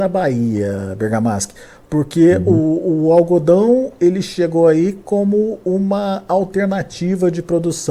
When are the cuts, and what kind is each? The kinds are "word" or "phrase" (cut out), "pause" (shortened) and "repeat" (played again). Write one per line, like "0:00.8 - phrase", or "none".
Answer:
none